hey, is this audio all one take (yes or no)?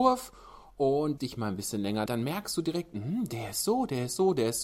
no